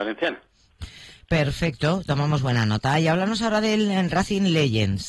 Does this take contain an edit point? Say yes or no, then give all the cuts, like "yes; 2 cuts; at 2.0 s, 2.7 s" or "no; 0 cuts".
no; 0 cuts